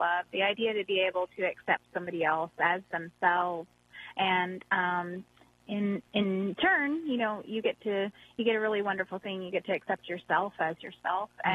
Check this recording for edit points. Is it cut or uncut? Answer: uncut